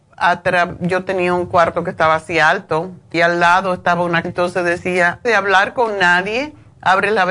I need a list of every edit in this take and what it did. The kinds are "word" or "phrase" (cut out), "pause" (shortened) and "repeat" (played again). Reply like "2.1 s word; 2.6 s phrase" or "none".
3.1 s word; 4.2 s word; 5.2 s word